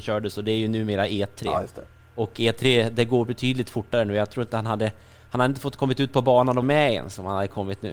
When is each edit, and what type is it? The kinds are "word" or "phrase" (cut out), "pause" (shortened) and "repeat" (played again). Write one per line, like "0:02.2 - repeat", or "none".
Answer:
0:06.6 - word